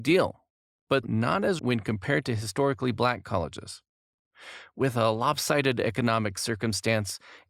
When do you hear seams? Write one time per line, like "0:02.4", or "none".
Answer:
0:01.0
0:01.6